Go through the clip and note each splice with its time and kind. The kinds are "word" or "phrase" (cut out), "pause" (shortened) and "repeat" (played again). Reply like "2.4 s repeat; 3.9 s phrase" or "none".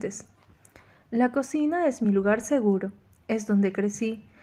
none